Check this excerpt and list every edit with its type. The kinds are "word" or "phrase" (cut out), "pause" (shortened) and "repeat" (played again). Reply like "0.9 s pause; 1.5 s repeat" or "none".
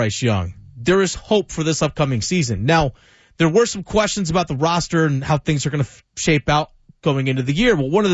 none